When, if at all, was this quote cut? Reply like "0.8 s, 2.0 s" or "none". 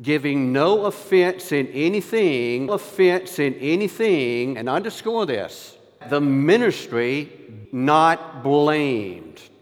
2.7 s, 6.0 s, 7.6 s